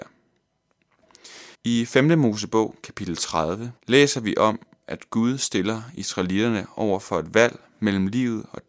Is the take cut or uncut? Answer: cut